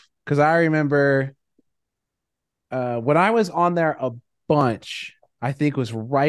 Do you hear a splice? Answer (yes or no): no